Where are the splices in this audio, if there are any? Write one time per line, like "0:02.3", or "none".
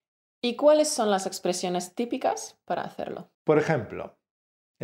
0:03.3

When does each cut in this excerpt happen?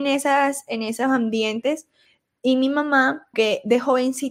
0:03.3

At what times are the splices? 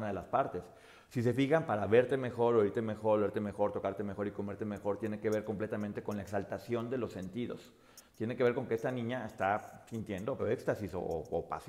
0:10.4

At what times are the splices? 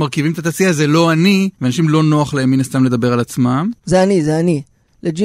0:01.5

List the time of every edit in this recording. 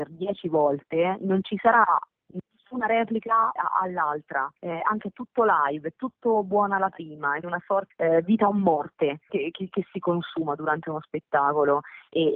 0:03.6
0:04.6
0:05.0
0:07.4
0:07.9
0:09.3

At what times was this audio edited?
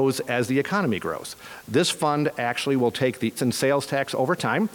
0:03.4

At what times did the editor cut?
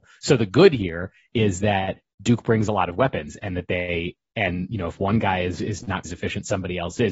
0:06.0

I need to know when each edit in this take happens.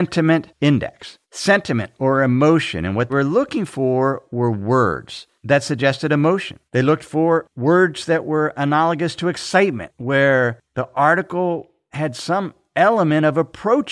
0:01.2
0:03.1
0:06.7

